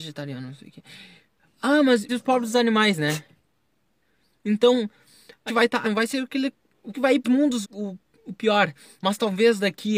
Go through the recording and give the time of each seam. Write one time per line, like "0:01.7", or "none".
0:02.1
0:05.5
0:05.8
0:06.9
0:07.2
0:07.6